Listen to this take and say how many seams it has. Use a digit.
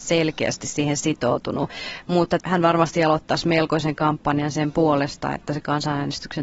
1